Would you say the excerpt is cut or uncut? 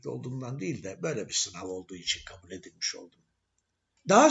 uncut